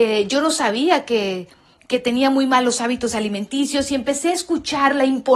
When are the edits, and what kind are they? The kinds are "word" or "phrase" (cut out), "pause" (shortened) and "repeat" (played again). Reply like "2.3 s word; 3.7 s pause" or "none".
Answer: none